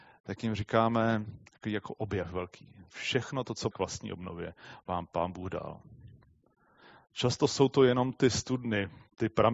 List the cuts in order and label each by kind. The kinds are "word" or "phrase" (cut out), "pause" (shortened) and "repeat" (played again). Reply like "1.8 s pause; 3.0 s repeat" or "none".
1.5 s pause; 3.7 s word